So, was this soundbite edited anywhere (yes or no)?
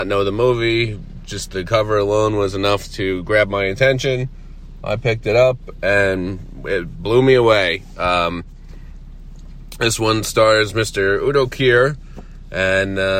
no